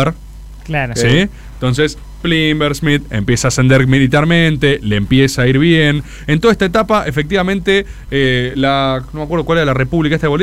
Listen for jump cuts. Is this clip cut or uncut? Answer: uncut